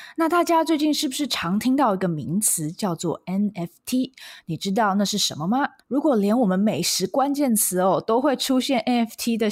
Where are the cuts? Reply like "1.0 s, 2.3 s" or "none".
5.8 s